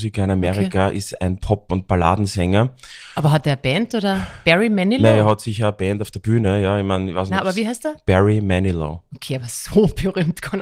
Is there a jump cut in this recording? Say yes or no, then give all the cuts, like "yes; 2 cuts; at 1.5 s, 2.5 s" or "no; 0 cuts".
no; 0 cuts